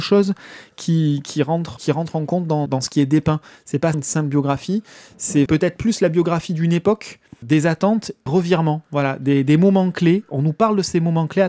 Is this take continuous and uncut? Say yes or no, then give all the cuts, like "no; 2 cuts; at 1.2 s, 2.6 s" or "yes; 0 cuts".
no; 6 cuts; at 1.8 s, 2.7 s, 3.9 s, 5.5 s, 7.4 s, 8.3 s